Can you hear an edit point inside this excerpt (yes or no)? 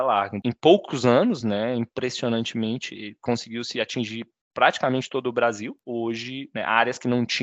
no